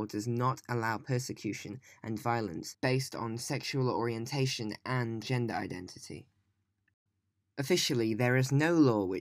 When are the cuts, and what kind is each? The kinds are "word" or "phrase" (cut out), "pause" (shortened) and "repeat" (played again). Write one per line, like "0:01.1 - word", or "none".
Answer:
0:05.2 - word